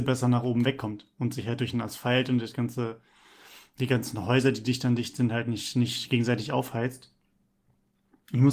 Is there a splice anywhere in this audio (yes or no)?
no